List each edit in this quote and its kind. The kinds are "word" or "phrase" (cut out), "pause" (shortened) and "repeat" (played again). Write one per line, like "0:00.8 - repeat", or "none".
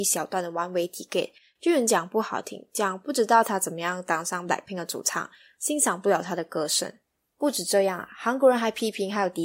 none